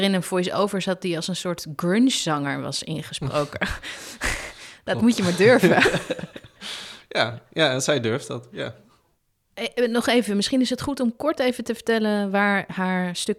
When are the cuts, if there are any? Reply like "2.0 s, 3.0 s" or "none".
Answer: none